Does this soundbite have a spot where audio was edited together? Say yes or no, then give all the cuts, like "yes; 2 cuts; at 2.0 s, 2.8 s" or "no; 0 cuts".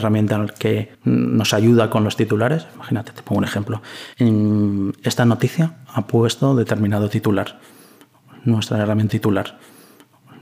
yes; 3 cuts; at 0.9 s, 4.1 s, 9.1 s